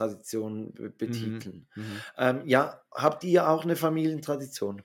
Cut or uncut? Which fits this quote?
uncut